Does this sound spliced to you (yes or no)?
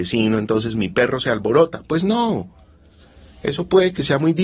no